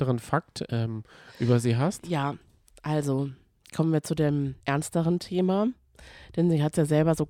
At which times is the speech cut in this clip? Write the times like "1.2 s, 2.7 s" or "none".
4.6 s